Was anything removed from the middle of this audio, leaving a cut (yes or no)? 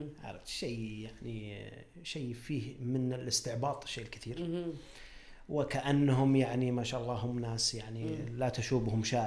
no